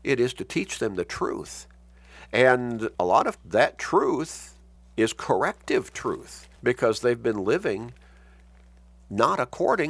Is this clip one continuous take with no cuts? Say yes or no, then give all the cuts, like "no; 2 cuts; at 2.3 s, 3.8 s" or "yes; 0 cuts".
no; 4 cuts; at 2.9 s, 3.4 s, 4.8 s, 6.6 s